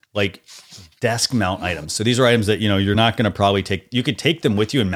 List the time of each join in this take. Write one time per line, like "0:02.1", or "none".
none